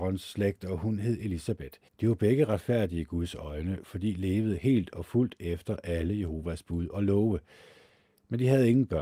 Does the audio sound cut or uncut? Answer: cut